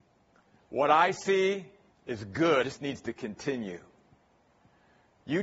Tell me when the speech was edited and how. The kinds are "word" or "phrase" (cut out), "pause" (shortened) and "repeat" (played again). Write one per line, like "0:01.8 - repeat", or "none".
0:01.9 - pause
0:02.6 - word